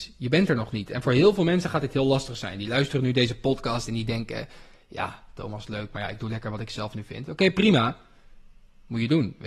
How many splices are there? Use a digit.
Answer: 0